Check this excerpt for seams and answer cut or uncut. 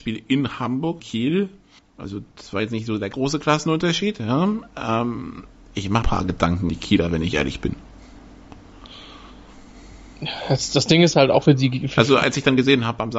cut